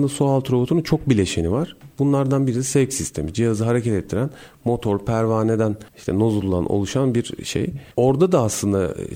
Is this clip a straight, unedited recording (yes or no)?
no